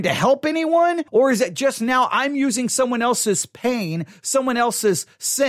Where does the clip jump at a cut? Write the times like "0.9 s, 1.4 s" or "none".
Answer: 1.1 s